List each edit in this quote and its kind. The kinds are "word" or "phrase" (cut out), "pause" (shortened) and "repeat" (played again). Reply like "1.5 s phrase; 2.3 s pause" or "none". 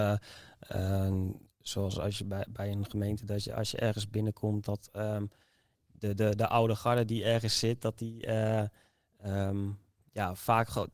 none